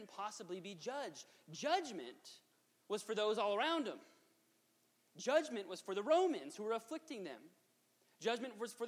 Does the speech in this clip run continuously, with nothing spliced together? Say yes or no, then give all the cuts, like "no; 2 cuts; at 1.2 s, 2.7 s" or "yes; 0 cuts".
yes; 0 cuts